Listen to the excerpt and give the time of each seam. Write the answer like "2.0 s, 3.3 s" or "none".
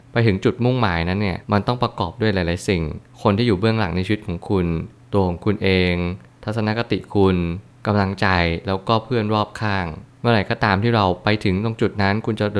1.4 s